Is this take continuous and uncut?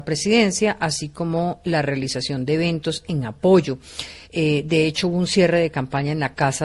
no; 1 cut; at 4.2 s

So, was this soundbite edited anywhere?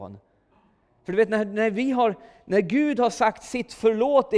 no; 0 cuts

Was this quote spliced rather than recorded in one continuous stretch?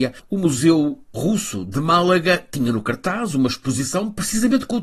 no; 0 cuts

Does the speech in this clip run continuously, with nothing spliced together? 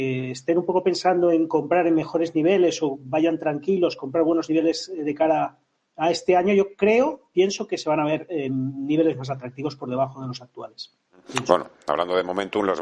yes; 0 cuts

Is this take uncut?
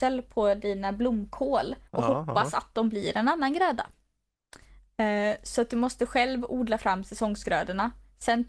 no; 1 cut; at 1.9 s

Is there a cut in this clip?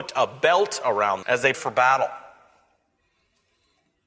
yes; 2 cuts; at 1.2 s, 1.5 s

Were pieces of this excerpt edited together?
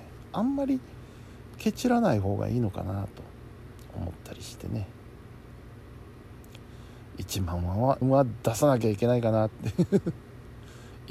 yes; 1 cut; at 8.0 s

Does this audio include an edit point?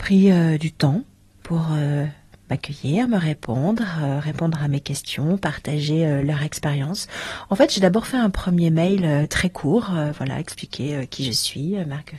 no; 0 cuts

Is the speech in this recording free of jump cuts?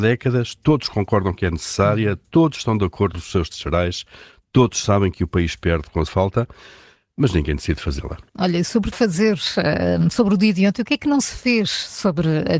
no; 5 cuts; at 3.1 s, 3.5 s, 6.1 s, 8.3 s, 8.9 s

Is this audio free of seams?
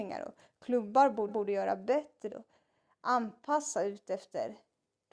no; 2 cuts; at 1.3 s, 2.3 s

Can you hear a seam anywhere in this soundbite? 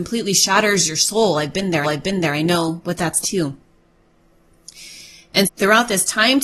yes; 3 cuts; at 1.8 s, 3.2 s, 5.5 s

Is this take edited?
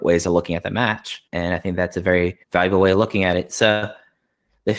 yes; 2 cuts; at 1.3 s, 2.4 s

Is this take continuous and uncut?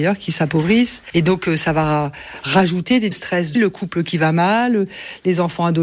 no; 2 cuts; at 3.1 s, 3.6 s

